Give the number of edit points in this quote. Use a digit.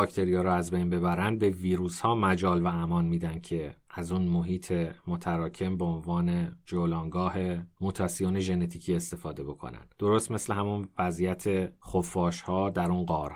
1